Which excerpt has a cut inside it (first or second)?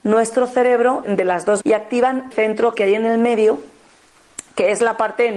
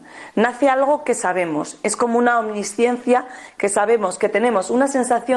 first